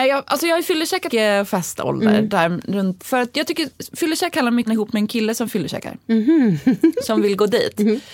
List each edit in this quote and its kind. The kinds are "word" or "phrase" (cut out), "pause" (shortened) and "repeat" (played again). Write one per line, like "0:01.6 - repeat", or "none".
0:01.1 - phrase
0:03.0 - word
0:04.7 - phrase
0:06.0 - pause